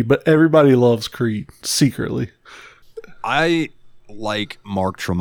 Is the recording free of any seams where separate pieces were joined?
yes; 0 cuts

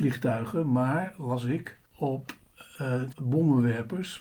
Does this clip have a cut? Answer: yes; 2 cuts; at 1.9 s, 3.1 s

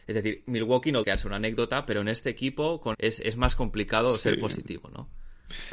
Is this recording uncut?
no; 2 cuts; at 1.0 s, 2.9 s

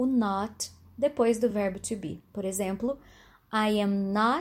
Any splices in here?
no; 0 cuts

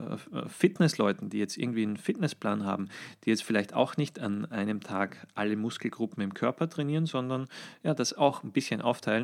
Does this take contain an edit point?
no; 0 cuts

